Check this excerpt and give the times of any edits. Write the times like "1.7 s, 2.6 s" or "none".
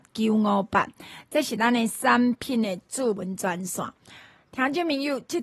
none